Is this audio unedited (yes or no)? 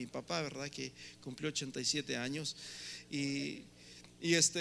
yes